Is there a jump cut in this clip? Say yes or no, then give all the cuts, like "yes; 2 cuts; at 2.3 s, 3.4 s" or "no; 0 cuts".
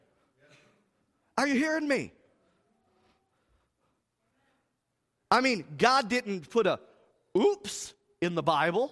no; 0 cuts